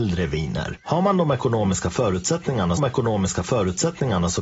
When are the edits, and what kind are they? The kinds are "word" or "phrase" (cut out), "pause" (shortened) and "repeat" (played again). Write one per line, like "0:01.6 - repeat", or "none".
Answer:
0:02.8 - repeat